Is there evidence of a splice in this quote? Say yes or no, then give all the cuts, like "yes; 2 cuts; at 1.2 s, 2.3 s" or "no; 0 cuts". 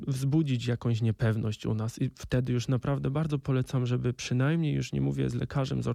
no; 0 cuts